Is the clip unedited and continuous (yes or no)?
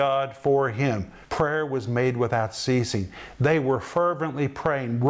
no